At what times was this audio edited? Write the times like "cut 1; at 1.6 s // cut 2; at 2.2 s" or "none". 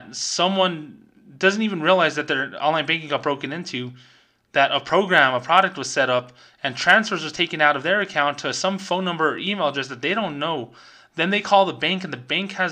none